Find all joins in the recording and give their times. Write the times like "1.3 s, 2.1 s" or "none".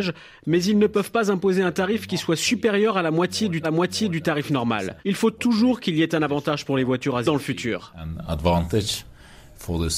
3.6 s, 5.0 s, 7.2 s